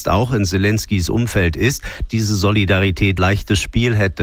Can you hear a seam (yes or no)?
yes